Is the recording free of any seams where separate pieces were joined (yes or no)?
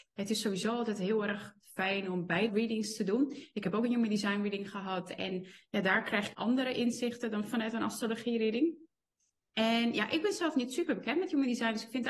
no